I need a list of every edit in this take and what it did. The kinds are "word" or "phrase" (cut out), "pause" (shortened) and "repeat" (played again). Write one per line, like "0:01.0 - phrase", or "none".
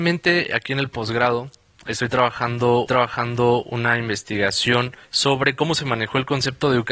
0:02.9 - repeat
0:05.0 - pause